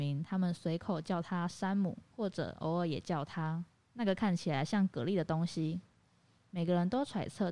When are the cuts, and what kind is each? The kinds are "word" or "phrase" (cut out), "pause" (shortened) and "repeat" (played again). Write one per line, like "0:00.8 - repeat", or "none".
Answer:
0:02.1 - pause
0:03.7 - pause